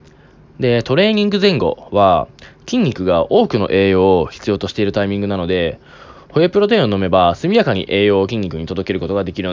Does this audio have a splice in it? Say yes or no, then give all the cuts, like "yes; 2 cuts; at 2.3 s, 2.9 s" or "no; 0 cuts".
no; 0 cuts